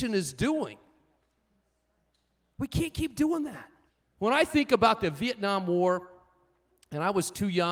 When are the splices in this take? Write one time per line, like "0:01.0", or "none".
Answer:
0:03.9